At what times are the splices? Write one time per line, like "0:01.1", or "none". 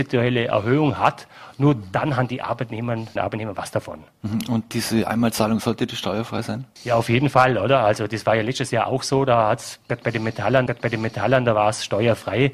0:03.2
0:06.8
0:10.7